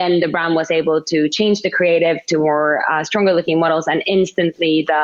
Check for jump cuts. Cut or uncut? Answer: uncut